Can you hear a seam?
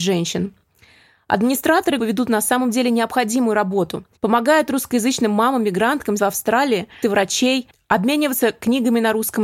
yes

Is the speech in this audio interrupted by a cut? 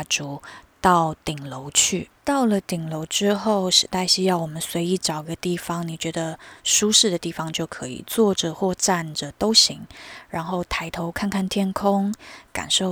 yes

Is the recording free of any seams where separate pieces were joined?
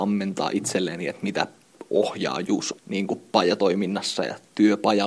no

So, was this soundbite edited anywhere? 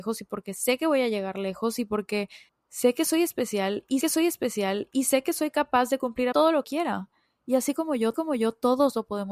yes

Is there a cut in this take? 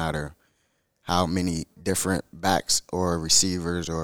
no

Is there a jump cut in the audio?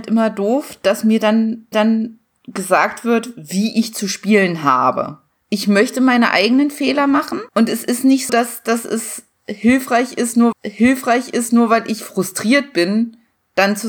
yes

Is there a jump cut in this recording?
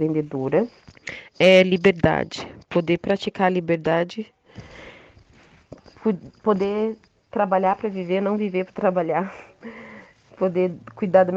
no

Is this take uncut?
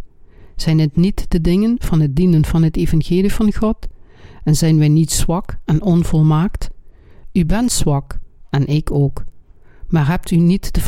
yes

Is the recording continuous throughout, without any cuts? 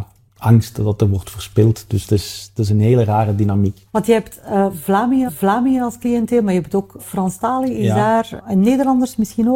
no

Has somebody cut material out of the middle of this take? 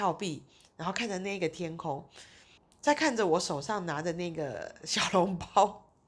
yes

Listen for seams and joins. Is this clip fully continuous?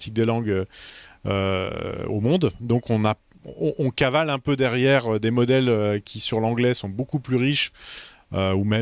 yes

